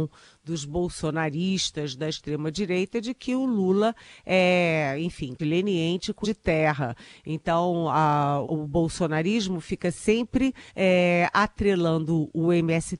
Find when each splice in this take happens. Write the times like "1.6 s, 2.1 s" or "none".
5.4 s, 6.2 s, 8.4 s, 10.7 s